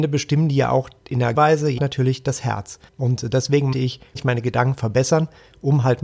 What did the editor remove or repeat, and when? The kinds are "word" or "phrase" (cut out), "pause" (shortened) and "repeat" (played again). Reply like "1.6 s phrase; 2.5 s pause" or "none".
1.0 s pause; 1.3 s word; 1.8 s phrase; 2.9 s pause; 3.7 s word; 4.2 s phrase